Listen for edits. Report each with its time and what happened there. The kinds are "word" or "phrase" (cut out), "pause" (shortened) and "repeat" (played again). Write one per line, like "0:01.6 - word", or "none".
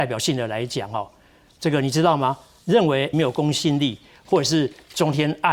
0:03.1 - word